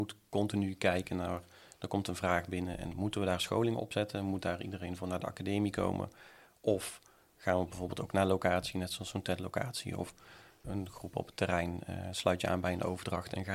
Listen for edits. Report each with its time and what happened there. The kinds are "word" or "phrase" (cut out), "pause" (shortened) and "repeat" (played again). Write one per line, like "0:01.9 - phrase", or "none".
0:10.6 - word